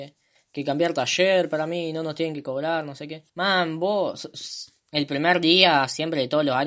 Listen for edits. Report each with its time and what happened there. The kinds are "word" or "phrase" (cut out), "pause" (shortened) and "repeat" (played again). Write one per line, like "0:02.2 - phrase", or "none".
0:03.3 - pause